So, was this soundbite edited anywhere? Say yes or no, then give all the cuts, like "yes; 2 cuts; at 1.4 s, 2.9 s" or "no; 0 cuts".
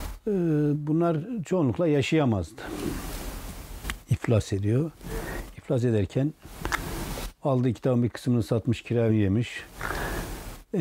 yes; 1 cut; at 9.1 s